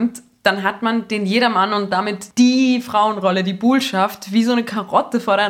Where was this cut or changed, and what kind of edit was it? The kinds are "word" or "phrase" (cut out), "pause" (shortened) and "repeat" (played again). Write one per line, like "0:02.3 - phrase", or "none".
0:02.3 - pause

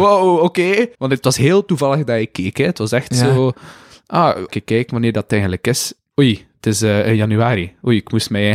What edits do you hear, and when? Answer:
0:00.9 - pause
0:04.5 - phrase

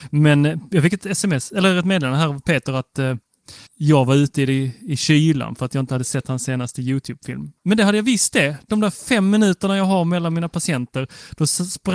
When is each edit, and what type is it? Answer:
0:03.7 - pause
0:07.6 - pause

